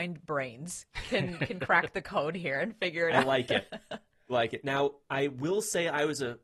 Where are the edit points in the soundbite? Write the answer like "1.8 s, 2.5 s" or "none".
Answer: 4.3 s